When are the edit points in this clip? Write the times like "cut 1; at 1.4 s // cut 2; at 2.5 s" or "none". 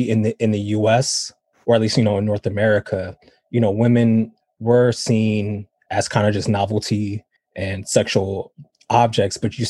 cut 1; at 7.4 s

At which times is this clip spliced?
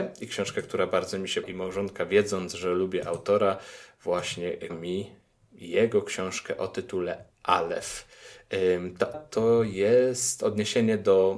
cut 1; at 1.4 s // cut 2; at 4.7 s // cut 3; at 7.3 s // cut 4; at 9.1 s

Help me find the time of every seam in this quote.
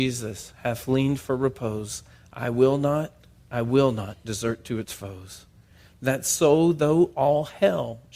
none

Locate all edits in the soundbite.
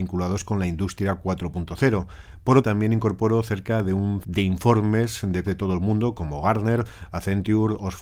cut 1; at 2.6 s // cut 2; at 4.2 s // cut 3; at 5.4 s

